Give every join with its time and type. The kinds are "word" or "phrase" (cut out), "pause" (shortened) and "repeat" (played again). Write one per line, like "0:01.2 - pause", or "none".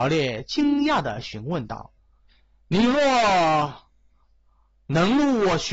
0:02.0 - pause